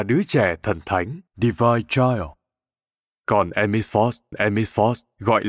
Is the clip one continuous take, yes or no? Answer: no